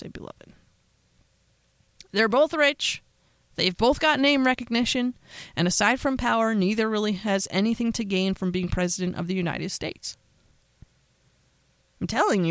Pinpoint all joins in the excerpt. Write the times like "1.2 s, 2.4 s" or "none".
none